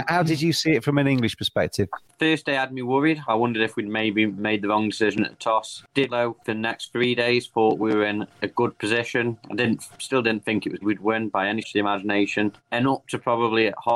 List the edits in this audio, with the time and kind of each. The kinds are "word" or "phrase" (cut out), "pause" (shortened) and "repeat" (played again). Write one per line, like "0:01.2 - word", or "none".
0:06.1 - word
0:06.4 - pause
0:09.9 - pause
0:10.8 - word
0:11.6 - word